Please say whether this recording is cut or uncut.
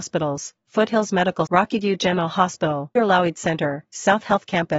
cut